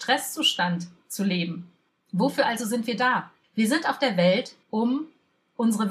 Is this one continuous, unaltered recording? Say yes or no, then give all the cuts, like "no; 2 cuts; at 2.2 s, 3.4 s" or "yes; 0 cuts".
no; 3 cuts; at 1.9 s, 3.4 s, 4.6 s